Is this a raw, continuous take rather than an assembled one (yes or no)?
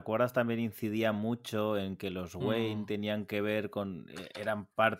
yes